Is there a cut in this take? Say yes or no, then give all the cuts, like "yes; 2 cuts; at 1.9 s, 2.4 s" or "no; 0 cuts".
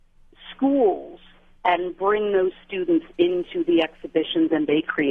no; 0 cuts